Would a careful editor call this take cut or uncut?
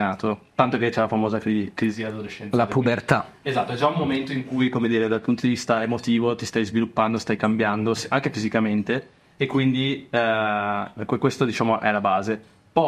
uncut